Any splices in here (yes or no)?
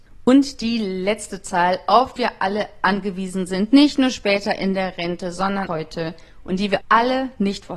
yes